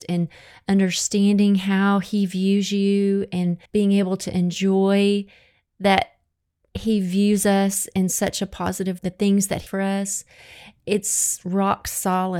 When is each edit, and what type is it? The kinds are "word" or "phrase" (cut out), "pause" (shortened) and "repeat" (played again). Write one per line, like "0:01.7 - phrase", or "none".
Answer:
0:03.7 - pause
0:09.0 - phrase
0:09.7 - word